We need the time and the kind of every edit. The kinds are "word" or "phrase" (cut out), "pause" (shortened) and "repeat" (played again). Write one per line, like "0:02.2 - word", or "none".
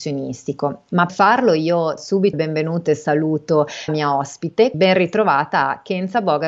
0:01.1 - word
0:02.0 - word
0:02.3 - word
0:03.9 - word
0:04.7 - word